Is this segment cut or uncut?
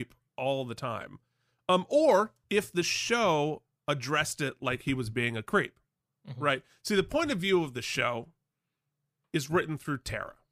cut